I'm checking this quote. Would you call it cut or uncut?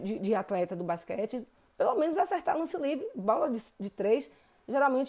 uncut